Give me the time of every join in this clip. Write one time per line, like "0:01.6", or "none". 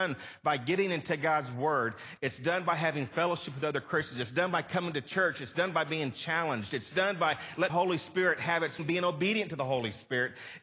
0:07.7
0:08.8